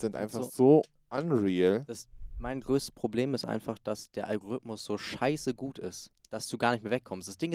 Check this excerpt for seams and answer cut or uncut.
uncut